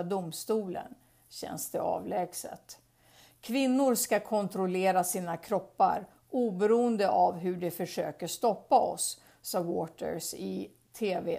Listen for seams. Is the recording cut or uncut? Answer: uncut